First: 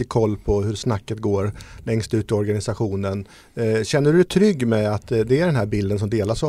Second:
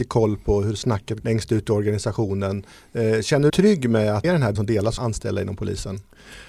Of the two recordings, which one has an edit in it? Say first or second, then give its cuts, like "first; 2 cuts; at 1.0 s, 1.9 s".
second; 5 cuts; at 1.2 s, 3.5 s, 4.2 s, 4.6 s, 5.0 s